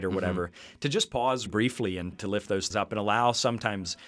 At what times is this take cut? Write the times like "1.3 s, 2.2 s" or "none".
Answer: 1.5 s, 2.1 s, 2.7 s